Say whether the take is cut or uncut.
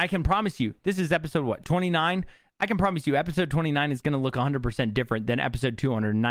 uncut